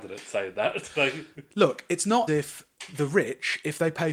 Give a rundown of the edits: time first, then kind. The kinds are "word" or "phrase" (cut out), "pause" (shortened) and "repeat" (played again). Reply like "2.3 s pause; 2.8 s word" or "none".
2.3 s word